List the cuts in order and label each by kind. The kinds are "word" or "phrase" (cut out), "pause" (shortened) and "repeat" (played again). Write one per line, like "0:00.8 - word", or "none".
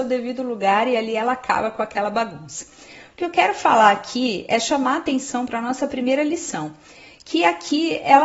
none